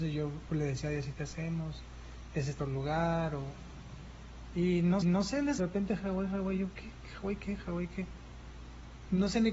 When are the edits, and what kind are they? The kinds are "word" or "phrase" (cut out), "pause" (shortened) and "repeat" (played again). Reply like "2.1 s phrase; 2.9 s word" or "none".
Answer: 1.2 s word; 2.6 s word; 5.0 s repeat; 5.6 s phrase; 6.0 s word